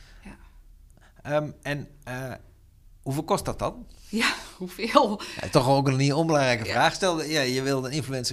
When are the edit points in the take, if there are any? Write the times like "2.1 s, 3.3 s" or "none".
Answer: 3.0 s